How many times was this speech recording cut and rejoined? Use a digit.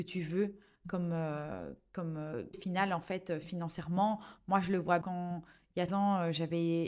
3